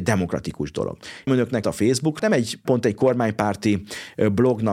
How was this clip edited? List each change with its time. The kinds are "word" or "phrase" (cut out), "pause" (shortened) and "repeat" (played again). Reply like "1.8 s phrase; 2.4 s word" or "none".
1.3 s word; 1.6 s phrase; 2.2 s word; 2.6 s word